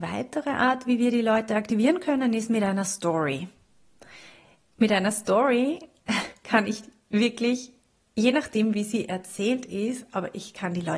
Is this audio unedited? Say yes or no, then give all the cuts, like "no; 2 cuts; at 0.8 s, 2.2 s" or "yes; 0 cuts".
yes; 0 cuts